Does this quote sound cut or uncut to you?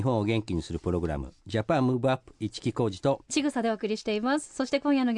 uncut